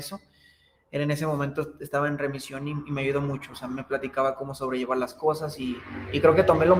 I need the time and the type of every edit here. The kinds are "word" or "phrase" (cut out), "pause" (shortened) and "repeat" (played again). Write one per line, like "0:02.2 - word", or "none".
none